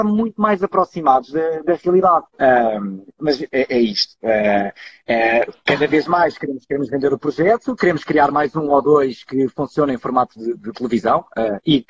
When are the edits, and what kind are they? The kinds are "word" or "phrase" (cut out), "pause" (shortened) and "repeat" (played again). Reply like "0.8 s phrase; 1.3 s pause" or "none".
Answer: 2.3 s pause